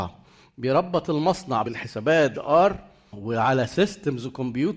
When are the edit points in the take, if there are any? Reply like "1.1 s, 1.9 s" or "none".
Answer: 1.6 s, 2.3 s